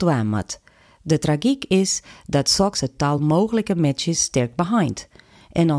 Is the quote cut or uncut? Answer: uncut